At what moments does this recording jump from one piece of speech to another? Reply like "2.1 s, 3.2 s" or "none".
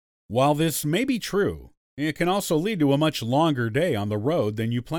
none